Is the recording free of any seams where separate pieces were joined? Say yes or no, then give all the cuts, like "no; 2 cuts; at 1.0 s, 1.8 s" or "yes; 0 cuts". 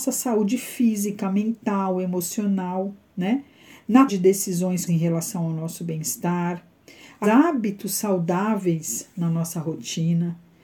no; 3 cuts; at 4.1 s, 4.9 s, 7.2 s